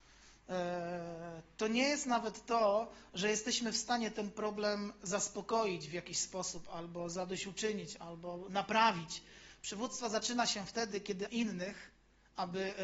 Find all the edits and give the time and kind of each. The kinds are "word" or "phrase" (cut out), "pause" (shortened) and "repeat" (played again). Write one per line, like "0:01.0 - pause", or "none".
0:11.3 - word